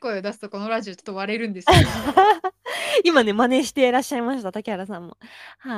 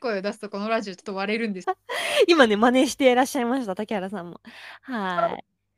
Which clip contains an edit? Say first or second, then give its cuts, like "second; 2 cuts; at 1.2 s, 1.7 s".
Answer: second; 1 cut; at 1.6 s